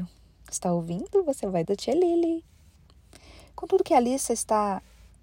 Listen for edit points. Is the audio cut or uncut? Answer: cut